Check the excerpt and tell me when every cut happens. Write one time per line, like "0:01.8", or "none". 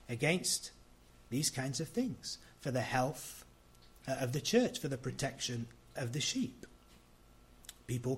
0:06.0